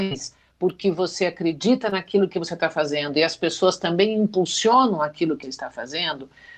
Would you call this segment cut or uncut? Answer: cut